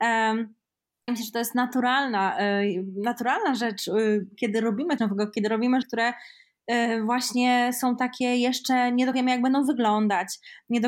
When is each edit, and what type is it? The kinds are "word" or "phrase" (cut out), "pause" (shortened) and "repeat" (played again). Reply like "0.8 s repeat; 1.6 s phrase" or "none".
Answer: 1.1 s word; 5.0 s word; 5.8 s word; 9.1 s word